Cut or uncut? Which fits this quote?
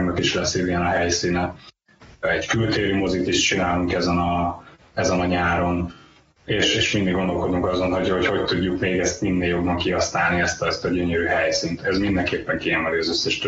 uncut